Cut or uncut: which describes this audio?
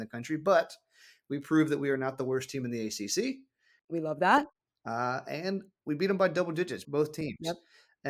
cut